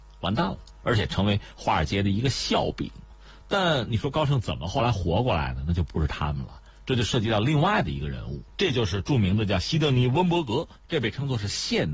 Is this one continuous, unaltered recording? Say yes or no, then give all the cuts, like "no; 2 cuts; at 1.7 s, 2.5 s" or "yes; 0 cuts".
yes; 0 cuts